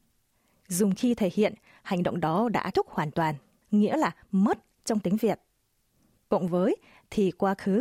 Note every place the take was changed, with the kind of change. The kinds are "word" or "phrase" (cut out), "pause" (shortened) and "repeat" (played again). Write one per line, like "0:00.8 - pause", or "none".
0:02.7 - word